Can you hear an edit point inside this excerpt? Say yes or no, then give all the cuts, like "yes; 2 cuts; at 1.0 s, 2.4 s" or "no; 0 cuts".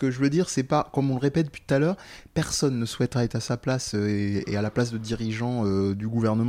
no; 0 cuts